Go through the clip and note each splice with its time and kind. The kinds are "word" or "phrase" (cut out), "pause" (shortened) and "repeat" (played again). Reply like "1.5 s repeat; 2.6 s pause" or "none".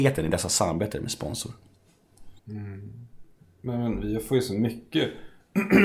2.4 s pause